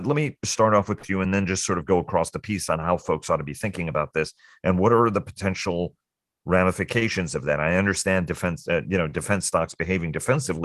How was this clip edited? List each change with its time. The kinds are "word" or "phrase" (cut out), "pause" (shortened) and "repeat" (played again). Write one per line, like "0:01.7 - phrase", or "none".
none